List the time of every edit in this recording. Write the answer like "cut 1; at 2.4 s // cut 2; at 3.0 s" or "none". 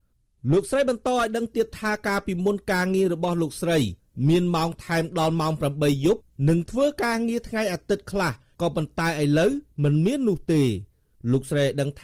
none